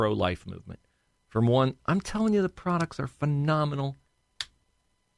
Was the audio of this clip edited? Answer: no; 0 cuts

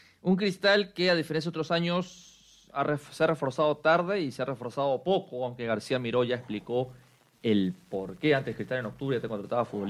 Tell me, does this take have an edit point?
no; 0 cuts

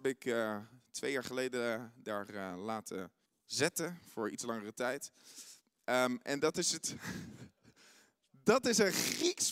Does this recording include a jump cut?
yes; 1 cut; at 3.3 s

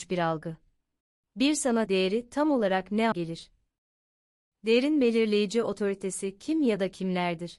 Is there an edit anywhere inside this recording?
yes; 3 cuts; at 1.0 s, 1.9 s, 3.1 s

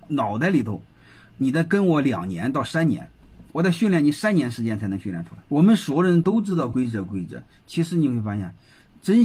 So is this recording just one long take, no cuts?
no; 2 cuts; at 3.5 s, 5.4 s

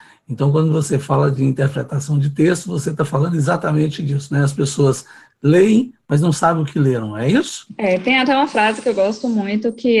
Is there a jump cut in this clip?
no; 0 cuts

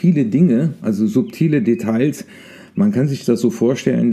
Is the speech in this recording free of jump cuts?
yes; 0 cuts

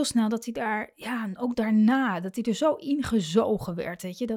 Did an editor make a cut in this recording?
yes; 1 cut; at 1.5 s

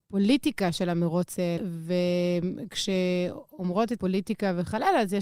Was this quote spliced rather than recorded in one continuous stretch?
yes; 2 cuts; at 1.6 s, 4.0 s

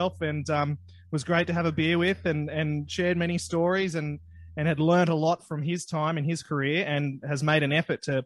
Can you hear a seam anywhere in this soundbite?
no; 0 cuts

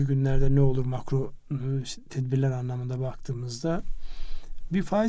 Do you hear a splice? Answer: no; 0 cuts

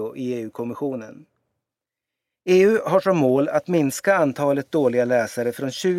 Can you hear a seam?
no; 0 cuts

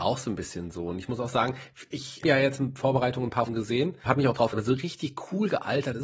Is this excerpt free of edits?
no; 4 cuts; at 2.2 s, 3.5 s, 4.1 s, 4.5 s

